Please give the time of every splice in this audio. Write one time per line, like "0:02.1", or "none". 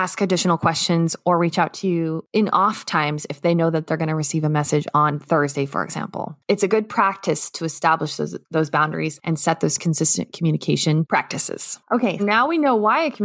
0:12.2